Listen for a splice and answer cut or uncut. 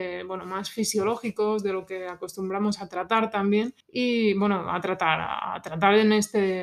cut